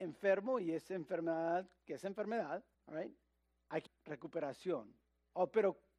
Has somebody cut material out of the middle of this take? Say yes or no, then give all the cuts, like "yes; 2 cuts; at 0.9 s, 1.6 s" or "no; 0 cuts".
yes; 2 cuts; at 2.7 s, 3.9 s